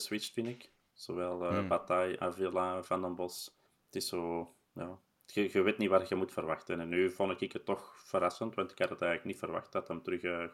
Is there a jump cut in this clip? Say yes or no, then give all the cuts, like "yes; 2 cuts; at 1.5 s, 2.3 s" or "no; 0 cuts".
yes; 2 cuts; at 3.7 s, 5.0 s